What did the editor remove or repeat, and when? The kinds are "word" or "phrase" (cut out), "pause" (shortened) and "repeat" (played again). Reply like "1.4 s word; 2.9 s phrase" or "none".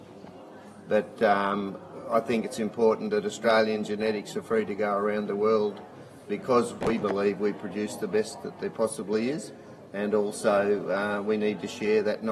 none